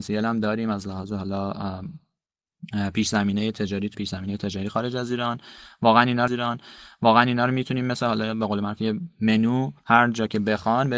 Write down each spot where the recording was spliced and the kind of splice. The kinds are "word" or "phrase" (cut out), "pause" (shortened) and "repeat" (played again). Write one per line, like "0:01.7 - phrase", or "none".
0:03.9 - word
0:06.3 - repeat
0:09.8 - pause